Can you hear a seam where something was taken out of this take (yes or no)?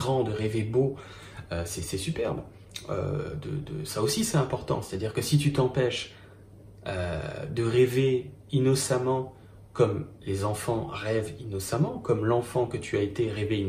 no